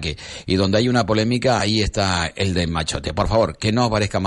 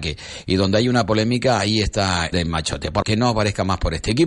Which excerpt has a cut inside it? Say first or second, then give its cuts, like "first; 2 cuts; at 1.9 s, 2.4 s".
second; 2 cuts; at 2.3 s, 3.0 s